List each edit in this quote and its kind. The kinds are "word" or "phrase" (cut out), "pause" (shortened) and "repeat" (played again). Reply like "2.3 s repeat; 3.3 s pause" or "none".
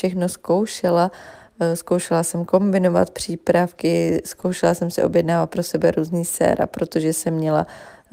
none